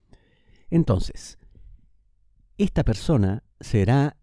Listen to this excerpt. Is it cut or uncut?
uncut